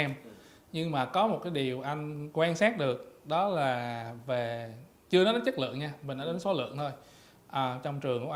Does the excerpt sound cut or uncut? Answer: uncut